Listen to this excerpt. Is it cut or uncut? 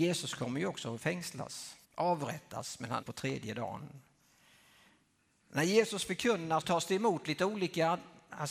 cut